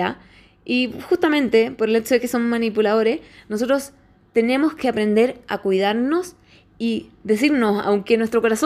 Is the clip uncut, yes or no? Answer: yes